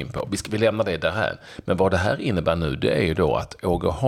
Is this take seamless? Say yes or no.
yes